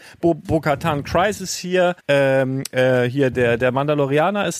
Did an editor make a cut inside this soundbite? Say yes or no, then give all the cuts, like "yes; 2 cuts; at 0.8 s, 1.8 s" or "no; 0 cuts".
yes; 2 cuts; at 2.0 s, 3.3 s